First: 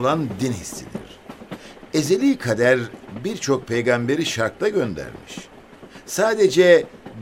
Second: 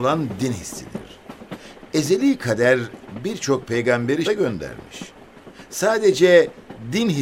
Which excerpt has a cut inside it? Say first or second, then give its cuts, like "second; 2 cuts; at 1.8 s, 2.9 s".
second; 1 cut; at 4.2 s